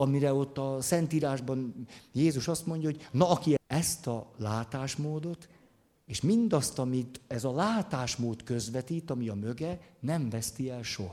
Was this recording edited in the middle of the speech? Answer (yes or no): yes